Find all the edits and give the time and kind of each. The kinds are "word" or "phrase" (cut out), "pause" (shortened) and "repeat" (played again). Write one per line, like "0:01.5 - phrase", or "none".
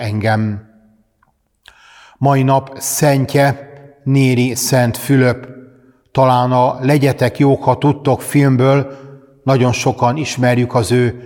none